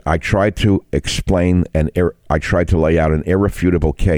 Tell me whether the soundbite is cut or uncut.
uncut